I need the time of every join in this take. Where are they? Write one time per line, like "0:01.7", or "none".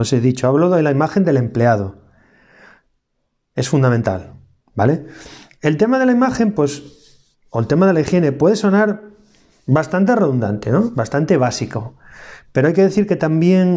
none